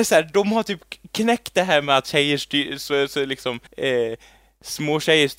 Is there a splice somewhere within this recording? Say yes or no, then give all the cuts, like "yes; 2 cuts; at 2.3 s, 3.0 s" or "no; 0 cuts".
yes; 1 cut; at 3.7 s